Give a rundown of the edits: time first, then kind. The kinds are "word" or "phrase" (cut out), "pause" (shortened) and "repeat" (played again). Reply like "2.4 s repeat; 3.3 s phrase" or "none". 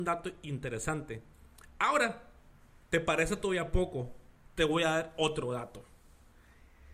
none